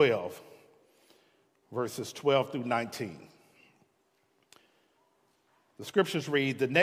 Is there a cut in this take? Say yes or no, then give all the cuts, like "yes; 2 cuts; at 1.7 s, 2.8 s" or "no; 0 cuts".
no; 0 cuts